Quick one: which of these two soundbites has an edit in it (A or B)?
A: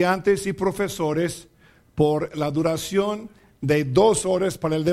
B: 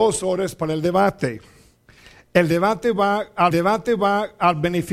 B